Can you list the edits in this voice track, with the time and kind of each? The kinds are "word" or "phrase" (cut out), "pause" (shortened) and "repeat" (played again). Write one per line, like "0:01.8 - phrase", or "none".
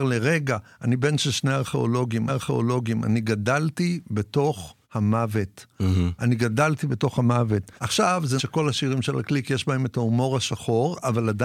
0:02.3 - repeat
0:04.8 - pause
0:07.8 - pause
0:08.4 - word